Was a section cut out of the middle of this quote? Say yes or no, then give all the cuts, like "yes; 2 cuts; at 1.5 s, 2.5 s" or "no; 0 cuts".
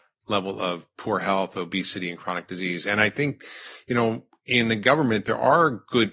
no; 0 cuts